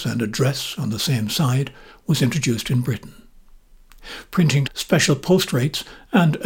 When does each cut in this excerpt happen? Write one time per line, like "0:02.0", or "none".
0:04.7